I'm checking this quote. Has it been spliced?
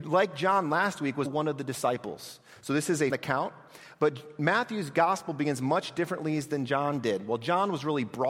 yes; 2 cuts; at 1.2 s, 3.1 s

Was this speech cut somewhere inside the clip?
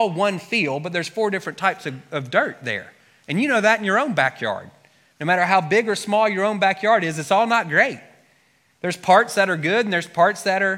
no; 0 cuts

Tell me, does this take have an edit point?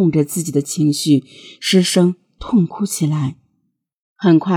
no; 0 cuts

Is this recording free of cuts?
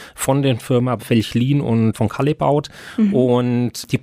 no; 2 cuts; at 1.0 s, 1.9 s

